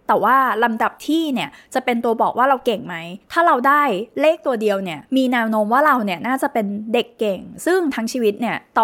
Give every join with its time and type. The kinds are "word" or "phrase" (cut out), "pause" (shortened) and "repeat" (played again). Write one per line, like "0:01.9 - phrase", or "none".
0:05.1 - pause